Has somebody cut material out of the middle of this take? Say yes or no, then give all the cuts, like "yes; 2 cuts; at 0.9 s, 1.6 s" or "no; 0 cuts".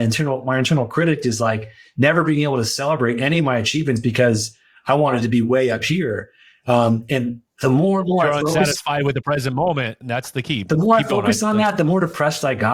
no; 0 cuts